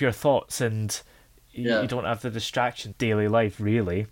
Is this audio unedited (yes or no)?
no